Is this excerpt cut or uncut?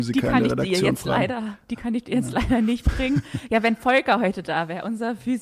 uncut